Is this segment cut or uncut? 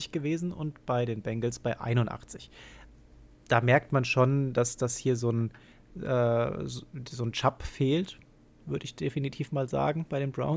uncut